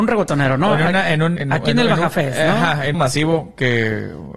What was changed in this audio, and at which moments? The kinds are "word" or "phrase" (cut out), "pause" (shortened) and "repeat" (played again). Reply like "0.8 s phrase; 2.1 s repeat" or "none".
1.4 s word; 2.9 s phrase